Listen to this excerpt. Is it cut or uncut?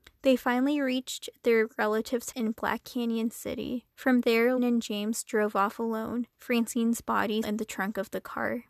cut